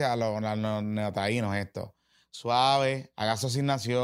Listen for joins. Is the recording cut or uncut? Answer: cut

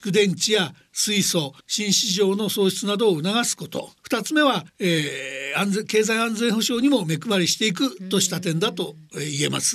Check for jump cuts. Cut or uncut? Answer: cut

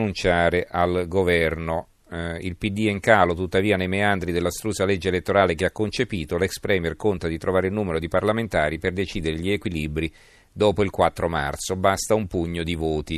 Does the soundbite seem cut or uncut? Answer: uncut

